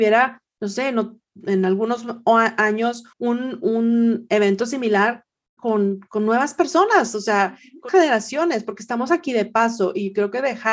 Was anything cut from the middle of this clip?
yes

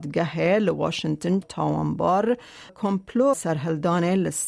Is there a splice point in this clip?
yes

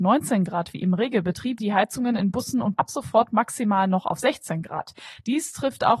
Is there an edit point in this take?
yes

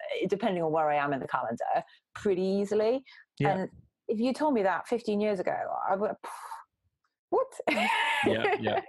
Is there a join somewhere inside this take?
no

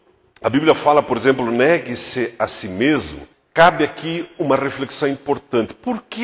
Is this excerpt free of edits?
no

